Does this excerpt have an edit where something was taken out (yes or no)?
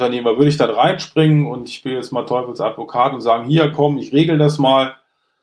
no